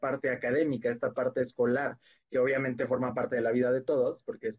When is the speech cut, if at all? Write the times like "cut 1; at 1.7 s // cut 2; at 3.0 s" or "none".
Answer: none